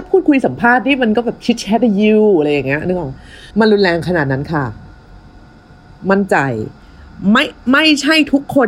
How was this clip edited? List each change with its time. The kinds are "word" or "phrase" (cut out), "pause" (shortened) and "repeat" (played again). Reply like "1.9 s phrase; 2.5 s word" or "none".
3.5 s pause